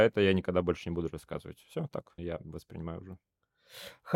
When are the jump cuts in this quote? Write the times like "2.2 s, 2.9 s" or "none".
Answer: 2.2 s